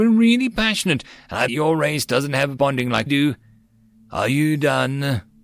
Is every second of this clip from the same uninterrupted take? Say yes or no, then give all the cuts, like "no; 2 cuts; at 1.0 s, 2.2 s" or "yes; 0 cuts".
no; 3 cuts; at 1.5 s, 2.6 s, 3.1 s